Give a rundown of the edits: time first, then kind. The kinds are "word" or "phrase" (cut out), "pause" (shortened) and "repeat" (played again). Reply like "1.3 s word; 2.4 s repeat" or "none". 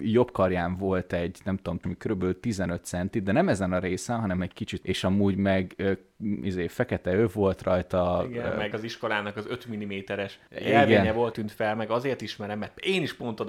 1.8 s phrase; 4.8 s word; 8.7 s word; 10.5 s pause; 11.3 s phrase